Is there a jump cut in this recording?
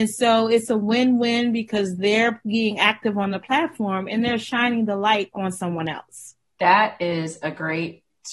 no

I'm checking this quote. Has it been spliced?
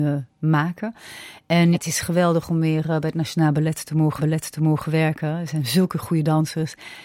yes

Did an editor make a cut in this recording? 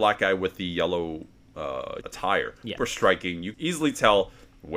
yes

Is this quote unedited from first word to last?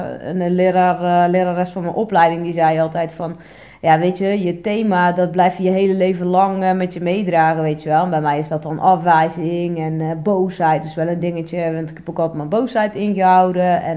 yes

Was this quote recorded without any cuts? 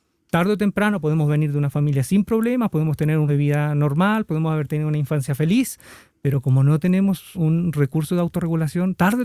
no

